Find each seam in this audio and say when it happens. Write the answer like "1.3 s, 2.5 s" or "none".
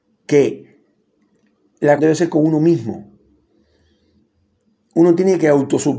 2.0 s